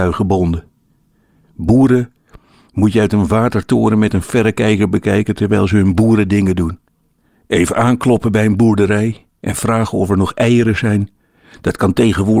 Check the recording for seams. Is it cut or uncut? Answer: uncut